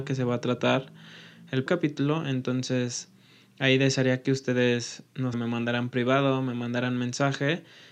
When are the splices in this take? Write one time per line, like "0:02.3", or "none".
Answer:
0:01.7
0:05.3